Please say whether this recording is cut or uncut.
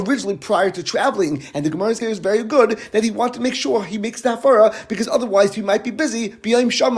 cut